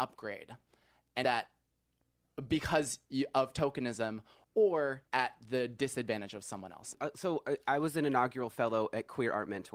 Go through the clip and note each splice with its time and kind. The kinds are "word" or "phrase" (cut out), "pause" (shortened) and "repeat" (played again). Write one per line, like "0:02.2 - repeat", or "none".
0:01.2 - word